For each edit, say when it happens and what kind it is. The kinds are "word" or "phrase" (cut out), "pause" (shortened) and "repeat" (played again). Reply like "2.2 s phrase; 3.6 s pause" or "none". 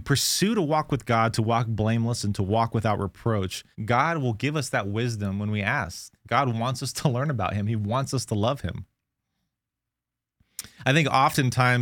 3.7 s pause